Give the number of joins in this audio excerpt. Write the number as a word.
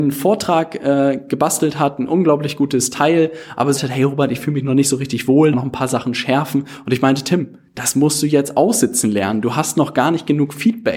two